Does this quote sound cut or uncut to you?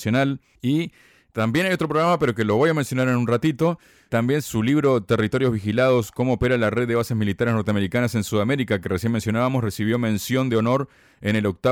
uncut